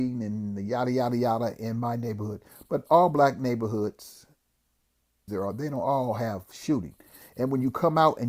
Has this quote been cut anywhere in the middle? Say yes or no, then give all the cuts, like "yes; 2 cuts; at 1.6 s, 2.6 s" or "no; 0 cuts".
yes; 1 cut; at 5.3 s